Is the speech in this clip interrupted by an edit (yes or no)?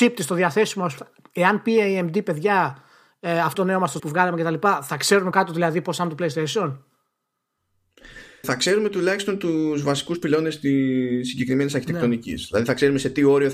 yes